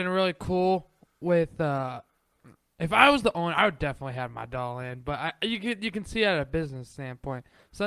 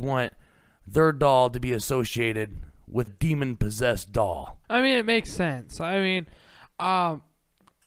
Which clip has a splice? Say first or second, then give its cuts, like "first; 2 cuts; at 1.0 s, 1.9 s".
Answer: second; 2 cuts; at 3.1 s, 4.6 s